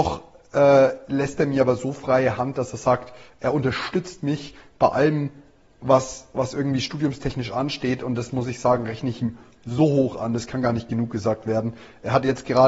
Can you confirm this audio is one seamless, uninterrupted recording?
yes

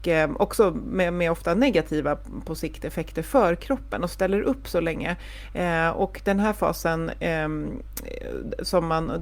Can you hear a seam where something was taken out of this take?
no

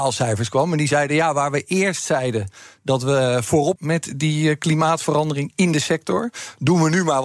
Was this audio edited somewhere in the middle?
yes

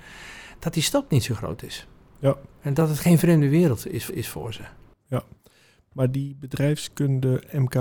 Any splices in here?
yes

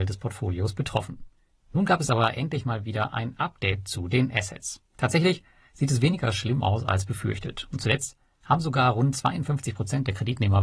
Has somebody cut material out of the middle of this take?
no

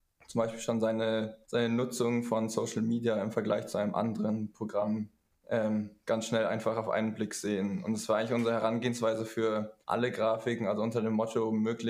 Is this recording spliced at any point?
yes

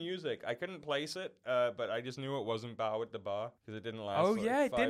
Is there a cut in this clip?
yes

